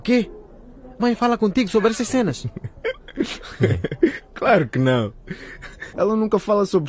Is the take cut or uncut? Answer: cut